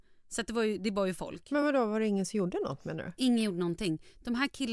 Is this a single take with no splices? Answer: yes; 0 cuts

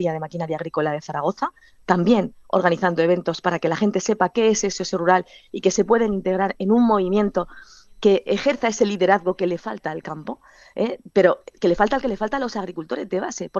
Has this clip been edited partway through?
yes; 1 cut; at 12.0 s

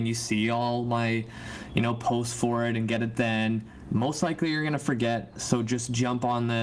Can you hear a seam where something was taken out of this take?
no; 0 cuts

